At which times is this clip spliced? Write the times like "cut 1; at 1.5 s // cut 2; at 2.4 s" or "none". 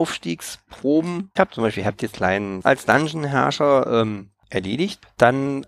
cut 1; at 1.4 s // cut 2; at 2.1 s // cut 3; at 2.6 s